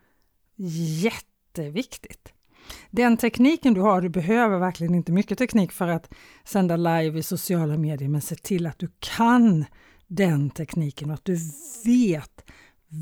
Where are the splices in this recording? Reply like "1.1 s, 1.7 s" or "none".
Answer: none